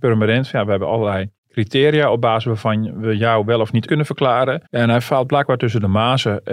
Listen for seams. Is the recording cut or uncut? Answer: cut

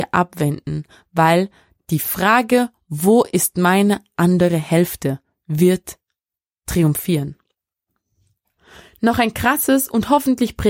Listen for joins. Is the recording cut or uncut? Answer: uncut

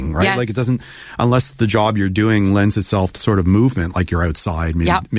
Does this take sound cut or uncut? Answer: cut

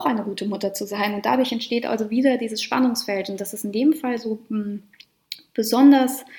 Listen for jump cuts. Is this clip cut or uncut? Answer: uncut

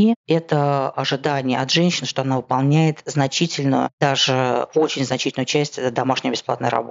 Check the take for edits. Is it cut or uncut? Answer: uncut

